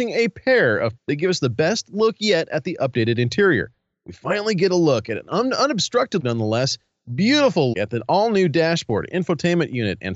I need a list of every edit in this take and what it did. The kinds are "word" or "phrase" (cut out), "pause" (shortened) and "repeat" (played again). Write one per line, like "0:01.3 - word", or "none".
0:01.0 - word
0:06.2 - word
0:07.7 - word